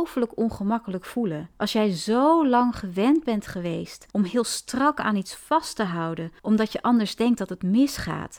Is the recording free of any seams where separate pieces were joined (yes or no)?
no